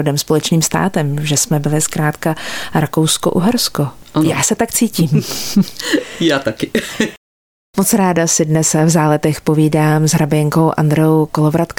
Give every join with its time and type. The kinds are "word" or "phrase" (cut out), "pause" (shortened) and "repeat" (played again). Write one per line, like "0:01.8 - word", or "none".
none